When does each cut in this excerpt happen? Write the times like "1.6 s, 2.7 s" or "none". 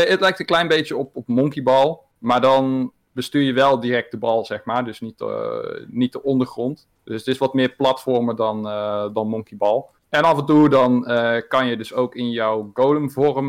2.1 s, 7.0 s, 10.0 s